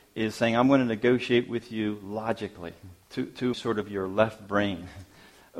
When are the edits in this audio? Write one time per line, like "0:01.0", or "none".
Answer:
0:03.0
0:03.5